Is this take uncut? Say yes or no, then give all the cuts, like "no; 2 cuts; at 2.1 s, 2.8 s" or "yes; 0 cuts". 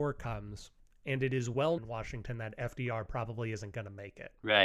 no; 1 cut; at 1.8 s